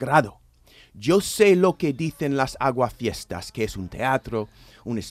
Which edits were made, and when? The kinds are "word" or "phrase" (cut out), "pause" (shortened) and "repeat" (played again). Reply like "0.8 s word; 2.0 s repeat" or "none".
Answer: none